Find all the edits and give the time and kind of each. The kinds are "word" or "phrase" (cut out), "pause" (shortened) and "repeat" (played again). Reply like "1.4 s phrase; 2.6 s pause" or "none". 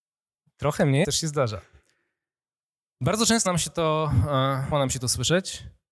1.0 s word; 3.5 s word; 4.7 s word